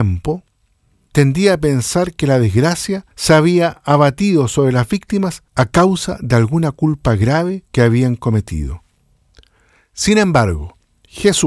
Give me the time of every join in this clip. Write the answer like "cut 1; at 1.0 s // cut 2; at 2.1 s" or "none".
cut 1; at 1.1 s // cut 2; at 3.1 s // cut 3; at 5.5 s // cut 4; at 7.7 s

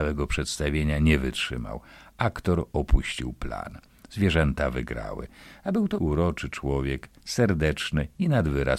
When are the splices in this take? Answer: cut 1; at 6.0 s

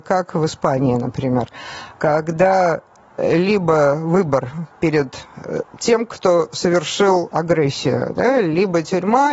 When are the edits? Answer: none

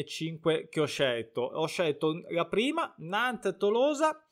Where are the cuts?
none

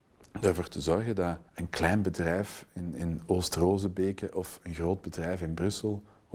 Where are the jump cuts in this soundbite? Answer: cut 1; at 1.5 s

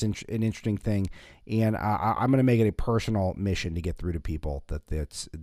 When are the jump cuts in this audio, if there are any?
none

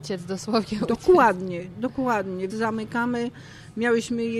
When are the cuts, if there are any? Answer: cut 1; at 2.5 s

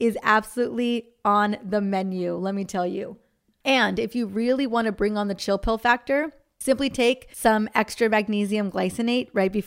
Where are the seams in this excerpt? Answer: none

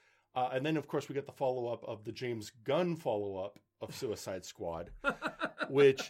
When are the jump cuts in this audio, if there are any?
cut 1; at 3.7 s

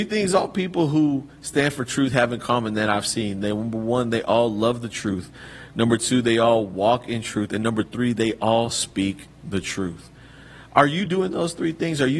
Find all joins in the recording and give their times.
none

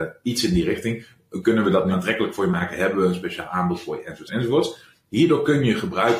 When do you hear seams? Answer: cut 1; at 1.9 s // cut 2; at 4.3 s

